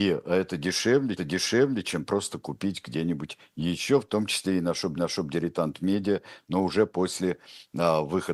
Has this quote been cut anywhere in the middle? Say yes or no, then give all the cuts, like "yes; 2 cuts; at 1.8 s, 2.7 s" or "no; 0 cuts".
yes; 2 cuts; at 1.2 s, 5.0 s